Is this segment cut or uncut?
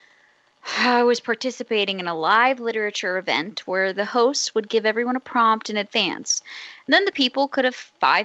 uncut